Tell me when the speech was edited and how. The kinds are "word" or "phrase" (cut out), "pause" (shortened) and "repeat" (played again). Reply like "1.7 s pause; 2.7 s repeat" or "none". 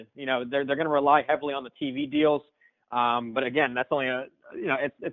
none